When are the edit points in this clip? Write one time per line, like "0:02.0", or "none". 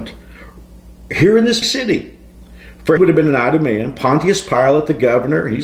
0:01.6
0:03.0

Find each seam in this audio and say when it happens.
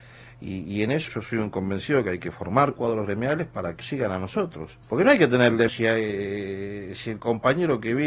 0:01.1
0:03.8
0:04.8
0:05.7

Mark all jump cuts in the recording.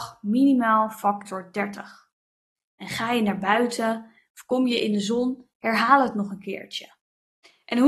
0:02.6

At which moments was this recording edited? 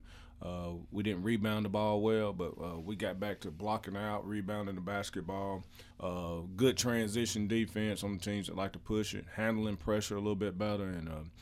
0:05.9

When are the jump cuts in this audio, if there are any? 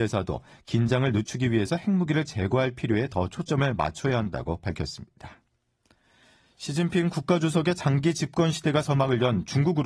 none

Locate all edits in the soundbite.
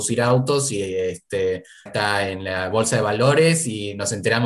0:01.9

